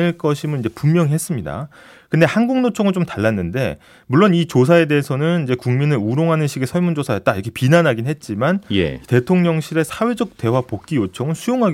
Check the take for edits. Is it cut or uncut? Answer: uncut